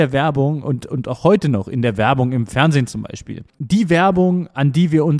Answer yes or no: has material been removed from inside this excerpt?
no